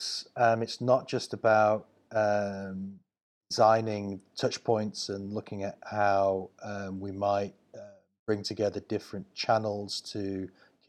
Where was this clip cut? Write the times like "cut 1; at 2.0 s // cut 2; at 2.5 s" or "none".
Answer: none